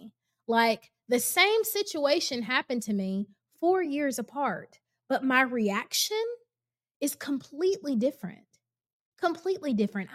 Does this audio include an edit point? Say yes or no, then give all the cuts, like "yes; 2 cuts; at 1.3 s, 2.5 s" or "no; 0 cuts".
no; 0 cuts